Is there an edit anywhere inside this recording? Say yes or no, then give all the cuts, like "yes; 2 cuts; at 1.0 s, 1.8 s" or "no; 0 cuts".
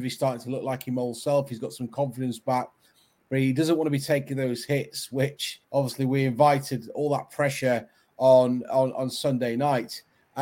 yes; 1 cut; at 5.6 s